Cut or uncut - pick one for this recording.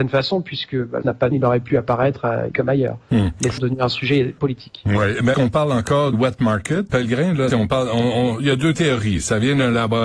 cut